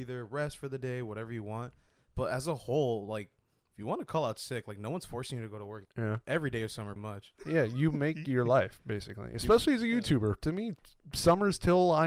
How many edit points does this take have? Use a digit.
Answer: 2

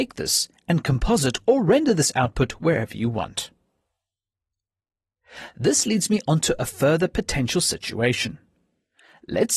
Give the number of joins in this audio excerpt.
0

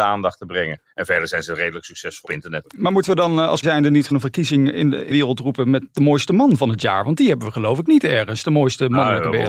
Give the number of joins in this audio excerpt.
6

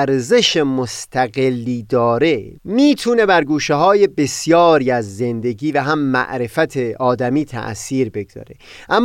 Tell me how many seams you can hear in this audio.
1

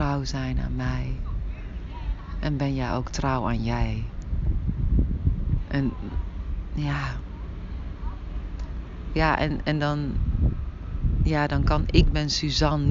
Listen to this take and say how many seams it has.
0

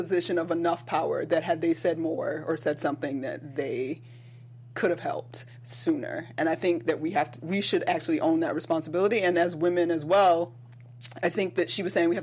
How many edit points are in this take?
0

